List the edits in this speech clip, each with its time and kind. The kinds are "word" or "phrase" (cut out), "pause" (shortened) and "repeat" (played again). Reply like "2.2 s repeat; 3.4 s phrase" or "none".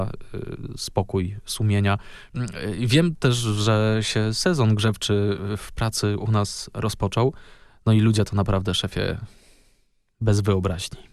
none